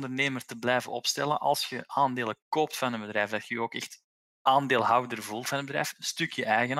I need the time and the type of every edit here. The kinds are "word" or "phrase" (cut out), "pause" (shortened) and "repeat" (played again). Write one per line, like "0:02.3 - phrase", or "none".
none